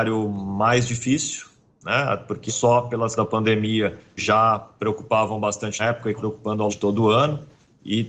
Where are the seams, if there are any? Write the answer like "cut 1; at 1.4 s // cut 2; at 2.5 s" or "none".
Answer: cut 1; at 2.5 s // cut 2; at 3.2 s // cut 3; at 4.2 s // cut 4; at 5.8 s // cut 5; at 6.2 s // cut 6; at 6.7 s